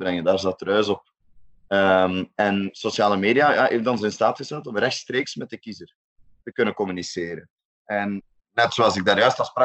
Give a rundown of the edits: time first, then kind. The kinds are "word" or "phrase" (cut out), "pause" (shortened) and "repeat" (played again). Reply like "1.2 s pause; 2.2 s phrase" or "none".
none